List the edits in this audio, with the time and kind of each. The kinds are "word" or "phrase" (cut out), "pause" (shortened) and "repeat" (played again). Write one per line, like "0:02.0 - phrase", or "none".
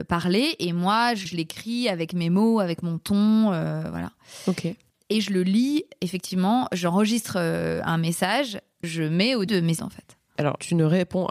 0:01.3 - word
0:08.8 - word
0:09.5 - word
0:09.8 - word